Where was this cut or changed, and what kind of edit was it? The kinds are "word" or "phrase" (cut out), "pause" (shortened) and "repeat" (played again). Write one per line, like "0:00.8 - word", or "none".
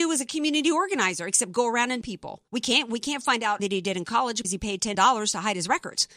0:02.0 - word
0:02.5 - pause
0:03.6 - word
0:04.4 - word
0:04.9 - word